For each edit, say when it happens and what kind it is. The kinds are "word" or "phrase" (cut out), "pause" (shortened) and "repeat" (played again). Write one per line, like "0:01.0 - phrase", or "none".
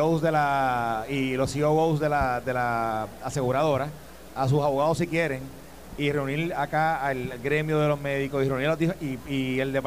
none